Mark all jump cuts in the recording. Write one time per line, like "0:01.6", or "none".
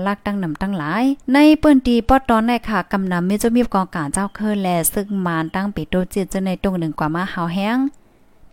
0:01.2